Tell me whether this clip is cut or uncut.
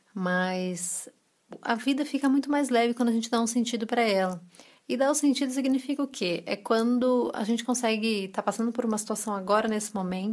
uncut